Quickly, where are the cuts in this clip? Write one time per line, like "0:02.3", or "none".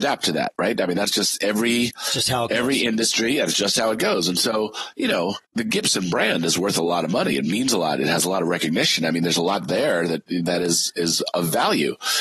0:05.4